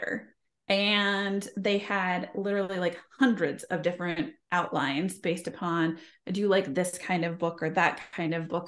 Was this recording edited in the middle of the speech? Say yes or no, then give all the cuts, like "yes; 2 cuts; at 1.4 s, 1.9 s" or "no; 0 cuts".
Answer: no; 0 cuts